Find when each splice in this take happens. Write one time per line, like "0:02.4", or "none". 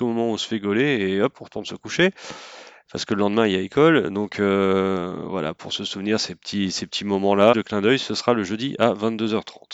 0:07.5